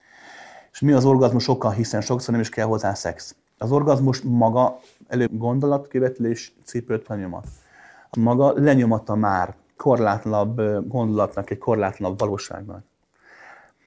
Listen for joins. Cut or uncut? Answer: cut